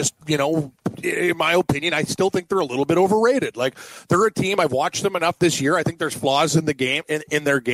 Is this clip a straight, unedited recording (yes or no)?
yes